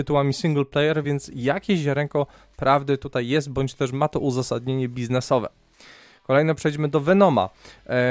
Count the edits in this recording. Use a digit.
0